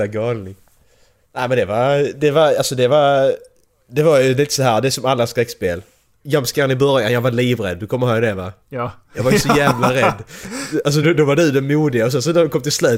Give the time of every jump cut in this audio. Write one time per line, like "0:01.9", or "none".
0:08.6
0:11.0